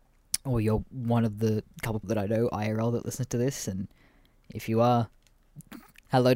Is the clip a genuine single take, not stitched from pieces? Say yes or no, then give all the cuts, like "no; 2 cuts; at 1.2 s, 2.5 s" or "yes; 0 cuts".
no; 1 cut; at 2.0 s